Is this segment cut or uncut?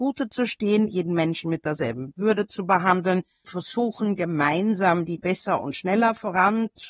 cut